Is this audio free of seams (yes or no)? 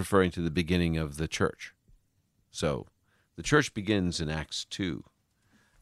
yes